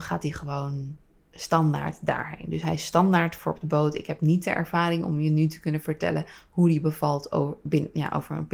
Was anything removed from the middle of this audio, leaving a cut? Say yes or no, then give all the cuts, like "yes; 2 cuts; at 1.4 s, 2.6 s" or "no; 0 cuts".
no; 0 cuts